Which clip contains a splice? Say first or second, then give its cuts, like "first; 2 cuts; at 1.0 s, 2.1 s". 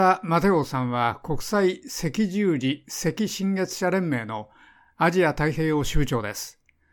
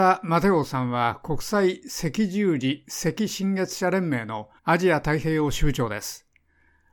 second; 1 cut; at 4.6 s